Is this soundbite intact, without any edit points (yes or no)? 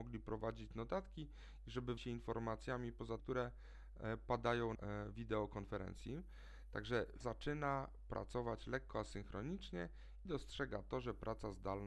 no